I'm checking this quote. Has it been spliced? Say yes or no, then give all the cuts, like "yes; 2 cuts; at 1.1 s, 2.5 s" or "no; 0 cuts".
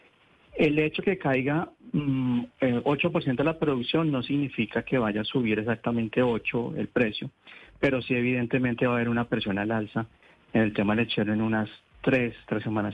no; 0 cuts